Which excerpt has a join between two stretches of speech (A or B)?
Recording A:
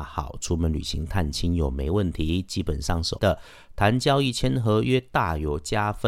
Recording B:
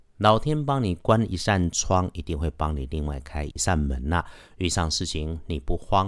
A